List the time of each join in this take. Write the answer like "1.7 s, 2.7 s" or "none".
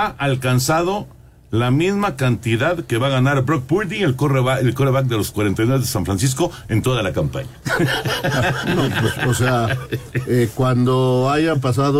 none